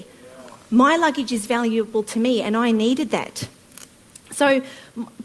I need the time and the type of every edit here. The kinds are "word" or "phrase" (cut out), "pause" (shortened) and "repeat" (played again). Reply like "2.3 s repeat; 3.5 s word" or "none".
none